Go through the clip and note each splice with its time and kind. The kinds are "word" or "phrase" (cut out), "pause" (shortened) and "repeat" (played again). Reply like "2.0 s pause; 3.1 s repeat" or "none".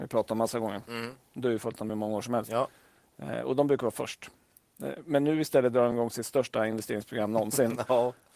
none